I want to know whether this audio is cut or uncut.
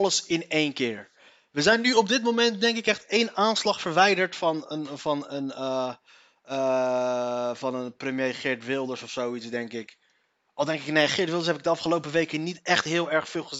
uncut